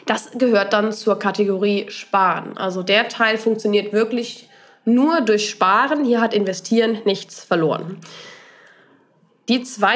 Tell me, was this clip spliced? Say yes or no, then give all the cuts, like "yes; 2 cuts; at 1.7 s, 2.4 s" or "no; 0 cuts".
no; 0 cuts